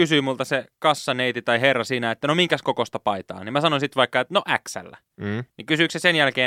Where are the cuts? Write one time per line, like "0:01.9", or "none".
0:05.5